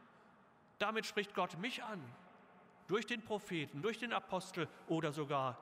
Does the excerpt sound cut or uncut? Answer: uncut